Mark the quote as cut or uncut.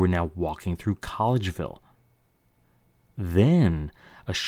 uncut